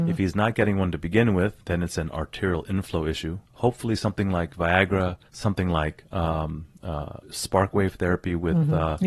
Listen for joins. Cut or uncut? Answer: cut